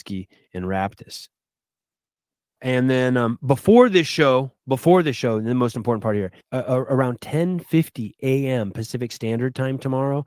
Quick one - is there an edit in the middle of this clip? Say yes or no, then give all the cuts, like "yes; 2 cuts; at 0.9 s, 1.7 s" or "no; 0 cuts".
yes; 2 cuts; at 2.6 s, 6.4 s